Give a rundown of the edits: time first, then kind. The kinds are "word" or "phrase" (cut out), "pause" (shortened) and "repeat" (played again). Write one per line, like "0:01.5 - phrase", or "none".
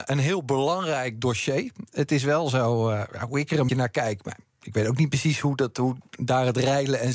0:03.7 - word